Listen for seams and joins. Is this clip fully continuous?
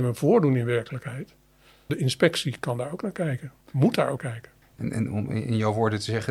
no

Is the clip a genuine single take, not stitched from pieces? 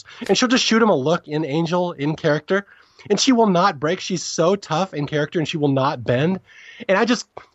yes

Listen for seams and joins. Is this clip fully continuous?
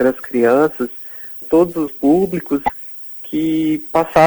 no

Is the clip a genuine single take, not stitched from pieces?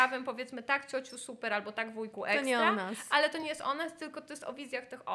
yes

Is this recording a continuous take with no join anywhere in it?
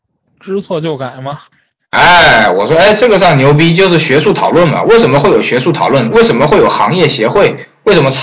yes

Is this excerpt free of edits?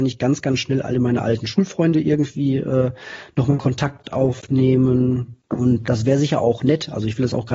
no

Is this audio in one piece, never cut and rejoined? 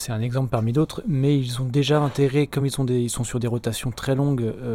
yes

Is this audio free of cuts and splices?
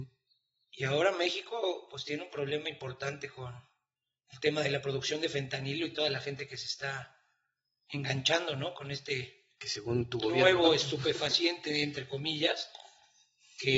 yes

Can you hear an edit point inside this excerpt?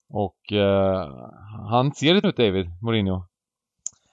yes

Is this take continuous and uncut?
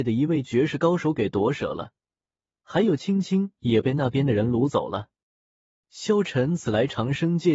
yes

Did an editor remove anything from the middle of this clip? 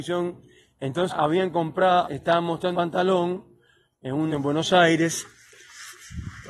yes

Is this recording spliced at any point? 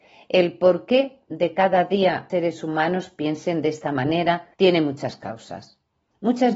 yes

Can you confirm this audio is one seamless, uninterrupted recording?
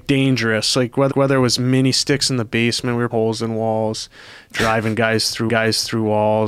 no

